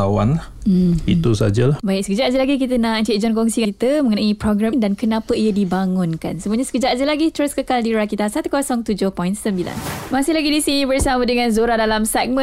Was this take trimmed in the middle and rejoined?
yes; 2 cuts; at 3.6 s, 4.7 s

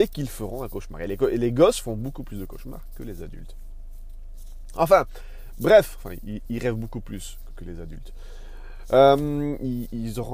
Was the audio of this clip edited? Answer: yes; 1 cut; at 7.5 s

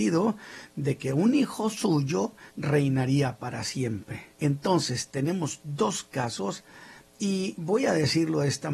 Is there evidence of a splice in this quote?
yes; 2 cuts; at 2.5 s, 4.3 s

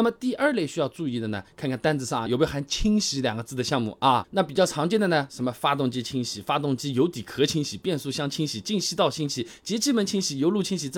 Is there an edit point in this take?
yes; 1 cut; at 2.3 s

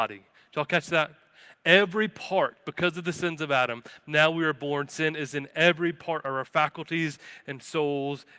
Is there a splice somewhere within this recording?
no; 0 cuts

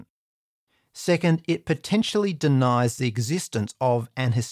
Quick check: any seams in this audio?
no; 0 cuts

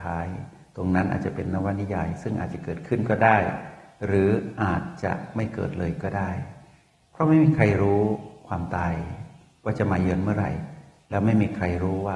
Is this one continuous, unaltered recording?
yes; 0 cuts

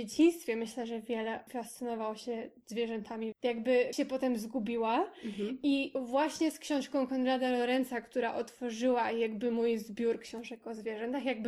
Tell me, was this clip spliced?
yes; 3 cuts; at 1.5 s, 3.3 s, 3.9 s

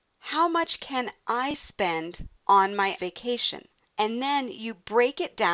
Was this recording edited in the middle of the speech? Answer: yes; 3 cuts; at 2.4 s, 3.0 s, 3.8 s

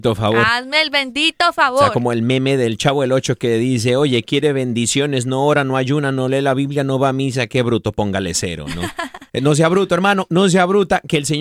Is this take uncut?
no; 1 cut; at 9.3 s

